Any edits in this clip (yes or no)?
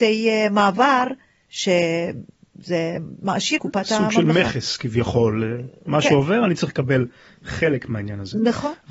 yes